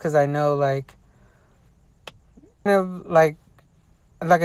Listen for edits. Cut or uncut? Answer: cut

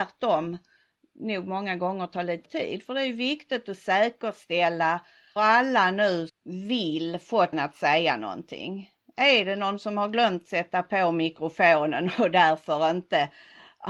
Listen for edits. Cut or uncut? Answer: cut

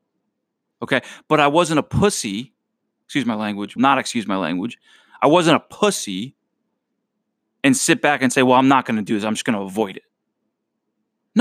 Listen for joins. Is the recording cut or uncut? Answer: cut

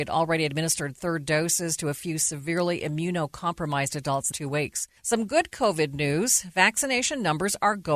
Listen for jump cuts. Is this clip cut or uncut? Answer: cut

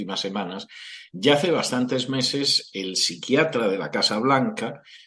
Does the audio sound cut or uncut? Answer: uncut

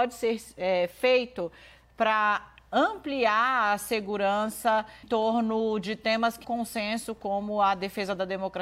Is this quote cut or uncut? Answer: cut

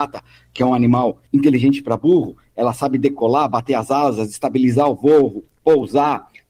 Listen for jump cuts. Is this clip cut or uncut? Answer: uncut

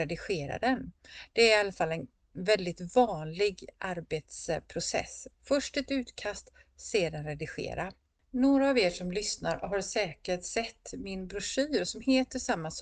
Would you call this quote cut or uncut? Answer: uncut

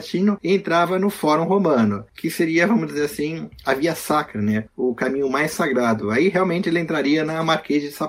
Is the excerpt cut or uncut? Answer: uncut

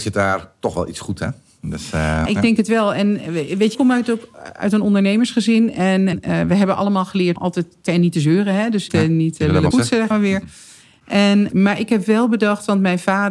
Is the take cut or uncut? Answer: cut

